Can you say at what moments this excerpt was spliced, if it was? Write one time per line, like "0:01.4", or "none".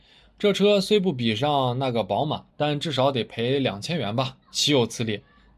0:02.5
0:04.4